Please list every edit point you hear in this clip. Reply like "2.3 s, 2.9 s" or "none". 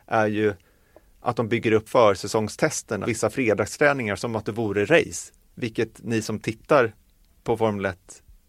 1.9 s, 3.1 s